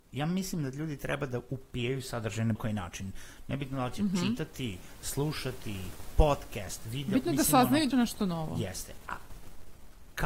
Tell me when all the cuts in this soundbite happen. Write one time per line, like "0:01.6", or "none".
0:02.6
0:07.9